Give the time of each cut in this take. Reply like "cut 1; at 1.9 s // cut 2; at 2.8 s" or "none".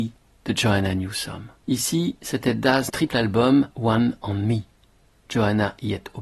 cut 1; at 1.6 s // cut 2; at 2.9 s // cut 3; at 3.7 s